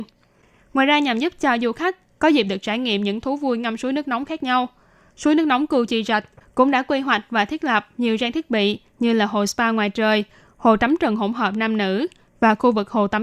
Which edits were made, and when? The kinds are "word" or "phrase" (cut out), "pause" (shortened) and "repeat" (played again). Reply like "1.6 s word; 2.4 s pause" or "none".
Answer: none